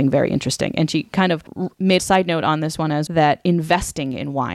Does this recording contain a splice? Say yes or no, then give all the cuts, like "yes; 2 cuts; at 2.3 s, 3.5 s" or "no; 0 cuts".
yes; 2 cuts; at 2.0 s, 3.1 s